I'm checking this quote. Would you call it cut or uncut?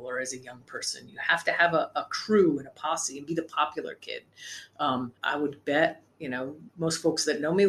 cut